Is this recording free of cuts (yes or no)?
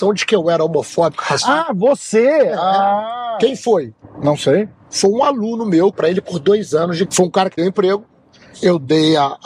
no